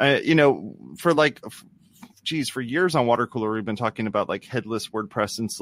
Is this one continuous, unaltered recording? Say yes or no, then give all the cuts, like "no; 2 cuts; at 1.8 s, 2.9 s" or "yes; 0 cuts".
yes; 0 cuts